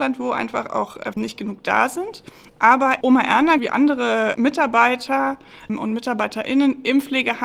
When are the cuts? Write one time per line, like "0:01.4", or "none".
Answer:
0:01.1
0:03.0
0:03.6